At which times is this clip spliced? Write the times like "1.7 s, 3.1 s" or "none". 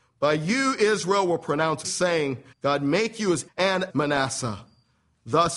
1.8 s, 2.5 s, 3.5 s, 3.9 s